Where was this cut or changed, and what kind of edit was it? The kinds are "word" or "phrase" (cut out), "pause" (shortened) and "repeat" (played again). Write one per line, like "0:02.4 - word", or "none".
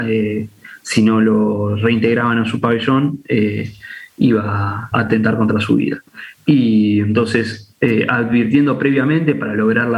0:04.9 - phrase